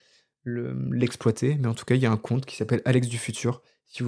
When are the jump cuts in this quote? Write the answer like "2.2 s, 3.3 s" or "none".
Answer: none